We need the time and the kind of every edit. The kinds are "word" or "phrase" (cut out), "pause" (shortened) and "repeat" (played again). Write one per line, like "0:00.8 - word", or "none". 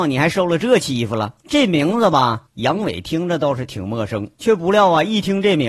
0:01.4 - pause
0:02.5 - pause
0:04.3 - pause